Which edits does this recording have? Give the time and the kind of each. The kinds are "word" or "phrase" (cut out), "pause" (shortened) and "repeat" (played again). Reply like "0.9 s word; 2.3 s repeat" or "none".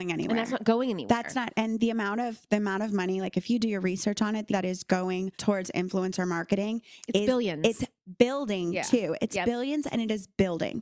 4.5 s phrase; 5.3 s pause